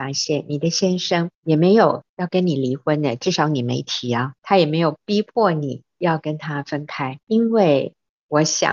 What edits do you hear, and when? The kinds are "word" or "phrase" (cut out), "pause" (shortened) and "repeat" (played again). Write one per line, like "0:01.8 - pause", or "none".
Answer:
0:01.3 - pause
0:02.1 - pause
0:04.4 - pause
0:07.2 - pause

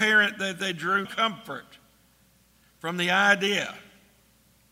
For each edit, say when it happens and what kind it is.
0:01.0 - word

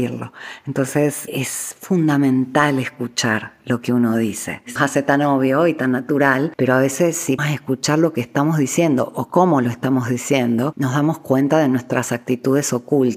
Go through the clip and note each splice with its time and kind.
0:01.3 - word
0:04.8 - word
0:07.4 - word

